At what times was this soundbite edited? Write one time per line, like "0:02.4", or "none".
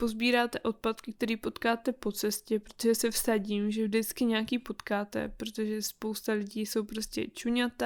none